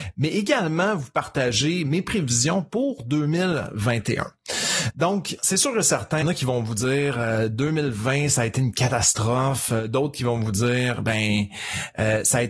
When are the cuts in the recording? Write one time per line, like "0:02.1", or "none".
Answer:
0:05.4
0:06.2